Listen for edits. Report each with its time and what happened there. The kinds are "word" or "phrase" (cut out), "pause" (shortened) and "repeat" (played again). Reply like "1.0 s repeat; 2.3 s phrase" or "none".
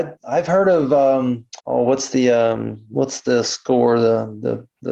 1.6 s pause